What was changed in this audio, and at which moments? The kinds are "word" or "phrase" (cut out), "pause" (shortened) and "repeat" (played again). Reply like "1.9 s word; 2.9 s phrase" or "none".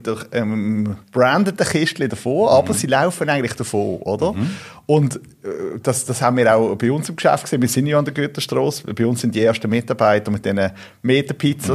1.0 s pause